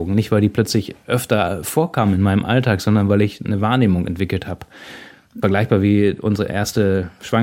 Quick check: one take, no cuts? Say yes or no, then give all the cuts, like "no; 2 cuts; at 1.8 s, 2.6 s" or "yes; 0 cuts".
yes; 0 cuts